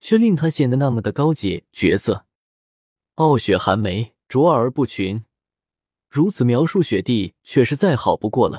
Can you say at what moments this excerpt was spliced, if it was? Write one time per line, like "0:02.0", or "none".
0:04.2